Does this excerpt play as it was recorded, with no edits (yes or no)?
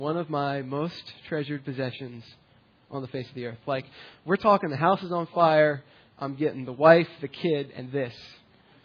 yes